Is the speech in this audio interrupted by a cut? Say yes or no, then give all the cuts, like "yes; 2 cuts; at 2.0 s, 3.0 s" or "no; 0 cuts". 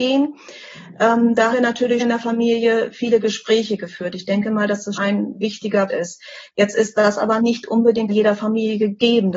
yes; 6 cuts; at 1.5 s, 2.0 s, 4.9 s, 5.9 s, 7.4 s, 8.1 s